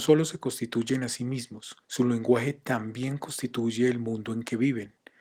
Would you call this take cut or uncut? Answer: cut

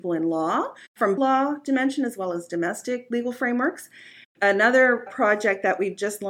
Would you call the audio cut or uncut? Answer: cut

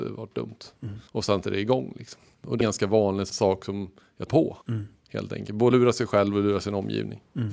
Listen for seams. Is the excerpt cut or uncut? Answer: cut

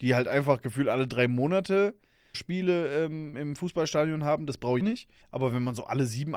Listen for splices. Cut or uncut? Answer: cut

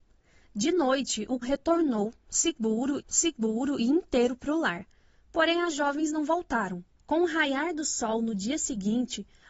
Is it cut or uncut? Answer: cut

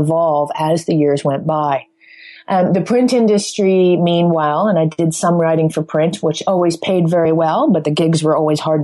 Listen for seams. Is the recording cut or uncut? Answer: uncut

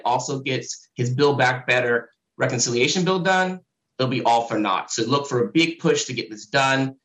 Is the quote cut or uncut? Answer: uncut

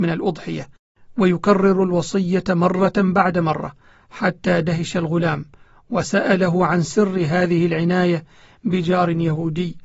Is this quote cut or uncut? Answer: uncut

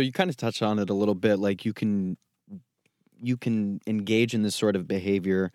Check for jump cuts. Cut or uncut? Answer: uncut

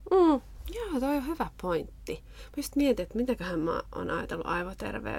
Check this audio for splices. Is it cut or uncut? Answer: uncut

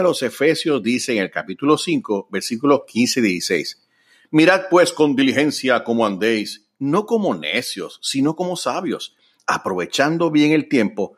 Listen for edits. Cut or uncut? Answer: uncut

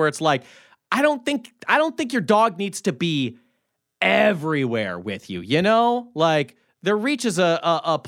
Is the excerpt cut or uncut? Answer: uncut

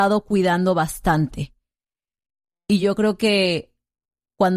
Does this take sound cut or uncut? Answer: uncut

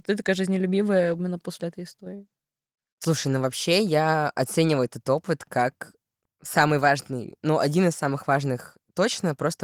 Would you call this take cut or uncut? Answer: uncut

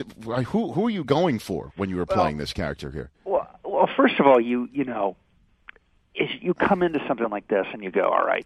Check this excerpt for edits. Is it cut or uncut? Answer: uncut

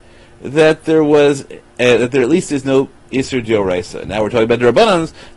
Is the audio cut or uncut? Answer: uncut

